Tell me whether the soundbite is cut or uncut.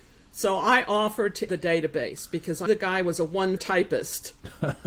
cut